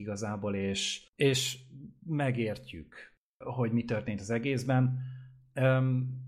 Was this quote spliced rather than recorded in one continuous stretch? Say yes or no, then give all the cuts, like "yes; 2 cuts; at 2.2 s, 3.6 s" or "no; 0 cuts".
yes; 2 cuts; at 1.1 s, 3.4 s